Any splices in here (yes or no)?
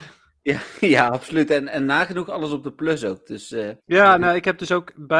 yes